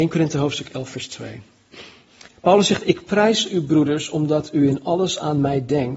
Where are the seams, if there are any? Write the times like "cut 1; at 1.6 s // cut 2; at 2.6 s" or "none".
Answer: cut 1; at 2.3 s